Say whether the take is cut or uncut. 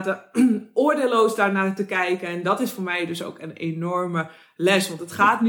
uncut